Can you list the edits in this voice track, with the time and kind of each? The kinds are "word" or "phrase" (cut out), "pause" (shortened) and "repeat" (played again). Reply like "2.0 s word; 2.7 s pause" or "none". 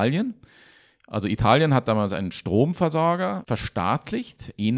none